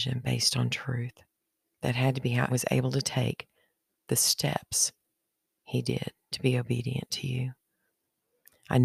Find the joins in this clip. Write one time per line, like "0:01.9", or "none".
0:01.4
0:02.5